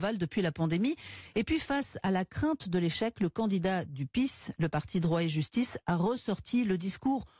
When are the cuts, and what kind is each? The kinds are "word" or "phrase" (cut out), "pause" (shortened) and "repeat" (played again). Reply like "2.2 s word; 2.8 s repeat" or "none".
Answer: none